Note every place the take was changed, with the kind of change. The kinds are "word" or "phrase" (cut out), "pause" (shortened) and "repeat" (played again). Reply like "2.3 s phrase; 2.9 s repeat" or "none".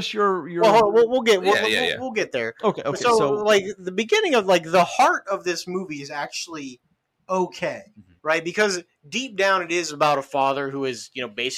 8.2 s pause